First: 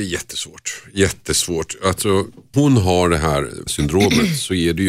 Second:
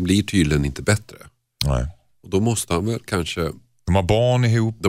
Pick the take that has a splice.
first; 2 cuts; at 2.5 s, 3.7 s

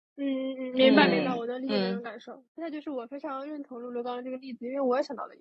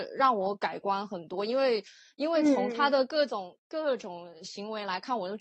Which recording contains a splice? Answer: first; 1 cut; at 2.5 s

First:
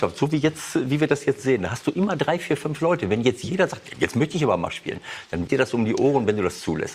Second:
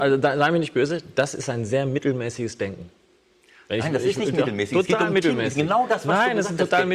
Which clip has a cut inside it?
first; 1 cut; at 5.5 s

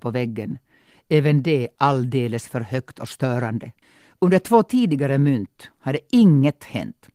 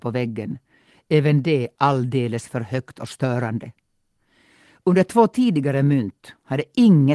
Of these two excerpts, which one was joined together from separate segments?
first; 1 cut; at 3.8 s

